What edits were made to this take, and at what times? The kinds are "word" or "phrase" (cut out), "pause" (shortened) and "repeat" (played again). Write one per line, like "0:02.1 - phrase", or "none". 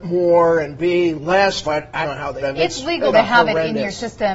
0:01.6 - word
0:02.0 - word
0:02.4 - word
0:03.1 - phrase